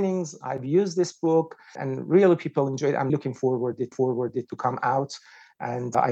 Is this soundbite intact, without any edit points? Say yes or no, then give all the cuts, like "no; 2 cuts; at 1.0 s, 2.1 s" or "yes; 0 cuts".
no; 2 cuts; at 3.1 s, 3.9 s